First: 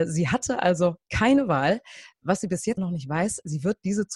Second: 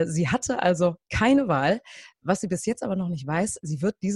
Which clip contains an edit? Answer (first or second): first